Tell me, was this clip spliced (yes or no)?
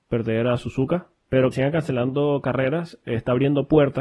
yes